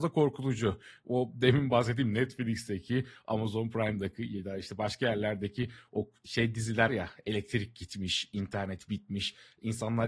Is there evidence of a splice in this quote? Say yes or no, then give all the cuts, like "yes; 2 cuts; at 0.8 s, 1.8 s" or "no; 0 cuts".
yes; 1 cut; at 6.9 s